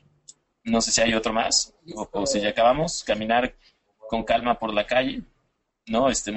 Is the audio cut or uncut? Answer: uncut